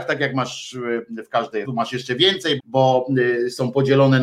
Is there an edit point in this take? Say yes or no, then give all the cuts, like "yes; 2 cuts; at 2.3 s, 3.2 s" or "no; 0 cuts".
yes; 2 cuts; at 1.6 s, 2.6 s